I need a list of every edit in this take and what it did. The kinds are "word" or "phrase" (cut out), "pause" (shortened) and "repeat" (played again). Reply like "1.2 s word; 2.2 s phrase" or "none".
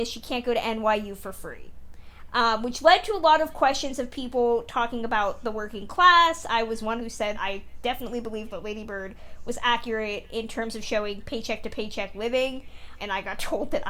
7.0 s phrase; 7.3 s word; 13.0 s word